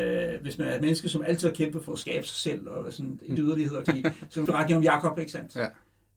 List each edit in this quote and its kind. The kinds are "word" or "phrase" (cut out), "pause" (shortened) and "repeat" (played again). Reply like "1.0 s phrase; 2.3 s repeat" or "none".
1.9 s word; 3.4 s phrase; 3.8 s phrase; 4.4 s word